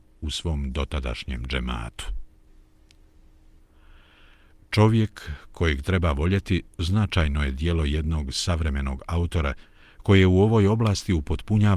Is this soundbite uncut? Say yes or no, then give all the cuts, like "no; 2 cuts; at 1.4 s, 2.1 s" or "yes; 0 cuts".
yes; 0 cuts